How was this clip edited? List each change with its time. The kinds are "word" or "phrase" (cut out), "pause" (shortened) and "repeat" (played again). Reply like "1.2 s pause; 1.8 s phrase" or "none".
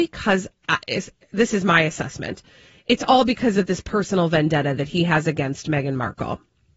none